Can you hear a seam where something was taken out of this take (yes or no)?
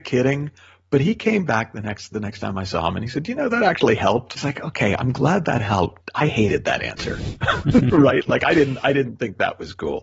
yes